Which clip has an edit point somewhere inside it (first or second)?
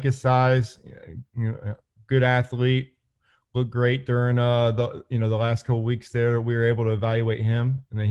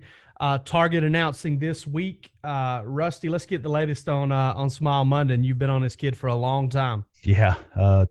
second